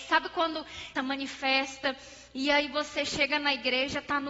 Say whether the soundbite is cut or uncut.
cut